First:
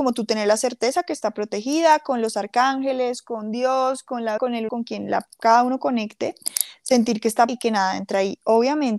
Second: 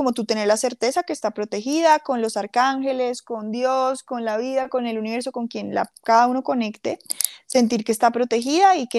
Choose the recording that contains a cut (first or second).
first